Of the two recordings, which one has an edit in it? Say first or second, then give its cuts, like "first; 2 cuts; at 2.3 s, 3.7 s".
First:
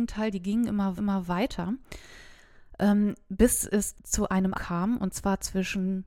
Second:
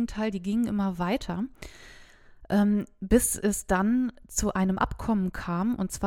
first; 3 cuts; at 1.0 s, 3.9 s, 4.5 s